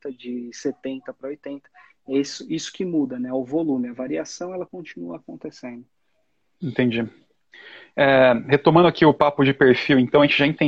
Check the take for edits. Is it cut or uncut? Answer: uncut